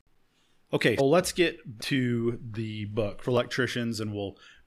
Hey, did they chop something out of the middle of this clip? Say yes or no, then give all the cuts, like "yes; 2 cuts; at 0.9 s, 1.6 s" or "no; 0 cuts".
yes; 3 cuts; at 1.0 s, 1.8 s, 3.2 s